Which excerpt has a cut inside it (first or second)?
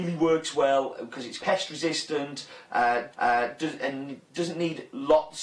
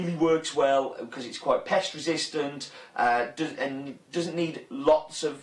first